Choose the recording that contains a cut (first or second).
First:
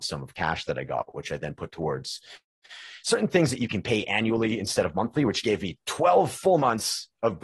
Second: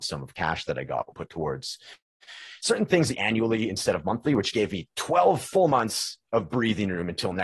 second